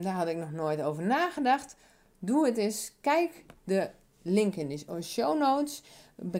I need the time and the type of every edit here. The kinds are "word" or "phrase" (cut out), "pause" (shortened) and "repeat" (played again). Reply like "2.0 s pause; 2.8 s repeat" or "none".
none